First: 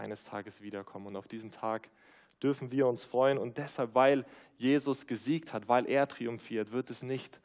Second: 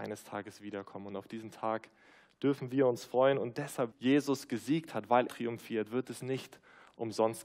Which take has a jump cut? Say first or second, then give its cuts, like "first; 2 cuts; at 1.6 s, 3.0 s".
second; 2 cuts; at 3.9 s, 5.3 s